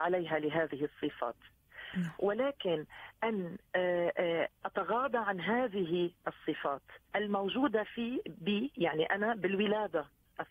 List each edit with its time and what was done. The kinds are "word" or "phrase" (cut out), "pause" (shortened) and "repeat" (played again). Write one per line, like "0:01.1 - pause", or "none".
0:04.6 - word
0:07.0 - pause